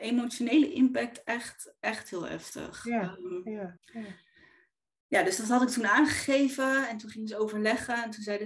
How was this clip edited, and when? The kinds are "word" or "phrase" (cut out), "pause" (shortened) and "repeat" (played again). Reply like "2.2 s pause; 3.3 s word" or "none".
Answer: 3.8 s pause